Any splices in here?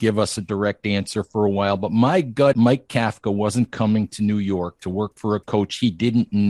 yes; 1 cut; at 2.5 s

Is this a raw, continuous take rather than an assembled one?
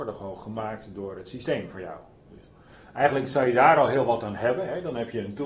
yes; 0 cuts

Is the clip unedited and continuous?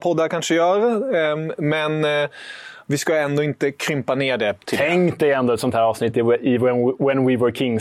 yes; 0 cuts

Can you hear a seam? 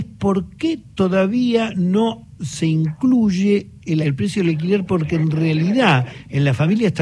yes; 2 cuts; at 2.3 s, 4.0 s

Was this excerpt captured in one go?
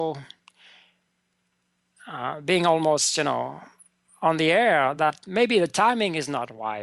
yes; 0 cuts

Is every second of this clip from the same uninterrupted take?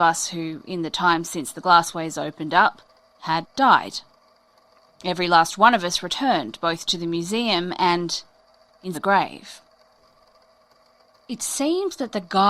no; 1 cut; at 8.9 s

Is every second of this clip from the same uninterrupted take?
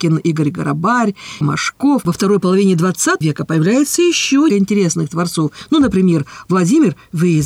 no; 3 cuts; at 1.4 s, 3.2 s, 4.5 s

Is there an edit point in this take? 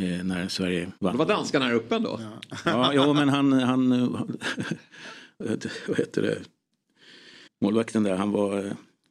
yes; 2 cuts; at 1.0 s, 7.5 s

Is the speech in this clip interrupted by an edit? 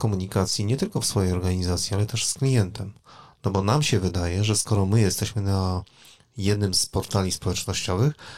no; 0 cuts

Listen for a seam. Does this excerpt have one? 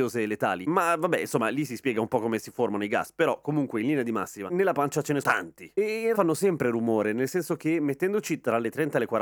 yes; 2 cuts; at 5.2 s, 6.1 s

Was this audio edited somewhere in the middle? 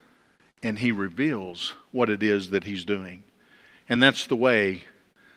no; 0 cuts

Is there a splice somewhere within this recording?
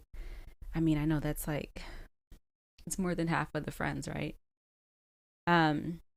no; 0 cuts

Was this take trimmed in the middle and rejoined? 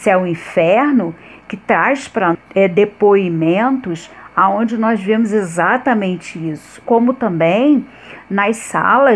yes; 2 cuts; at 2.3 s, 6.8 s

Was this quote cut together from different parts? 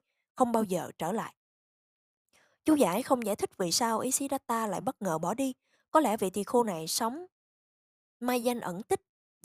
no; 0 cuts

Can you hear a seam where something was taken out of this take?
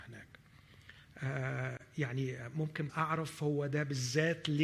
yes; 1 cut; at 2.9 s

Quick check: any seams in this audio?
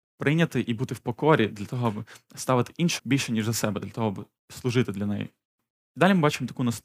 yes; 1 cut; at 3.0 s

